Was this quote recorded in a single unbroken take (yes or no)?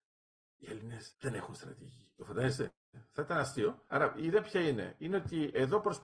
no